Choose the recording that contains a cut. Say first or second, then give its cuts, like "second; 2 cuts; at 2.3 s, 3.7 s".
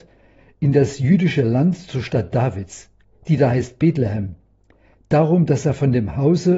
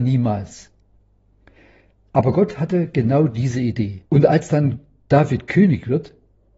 second; 1 cut; at 4.1 s